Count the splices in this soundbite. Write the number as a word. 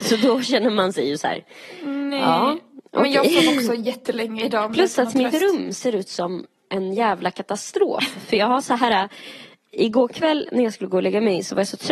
zero